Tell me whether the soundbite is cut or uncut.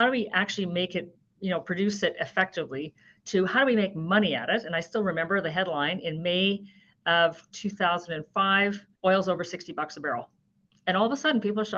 cut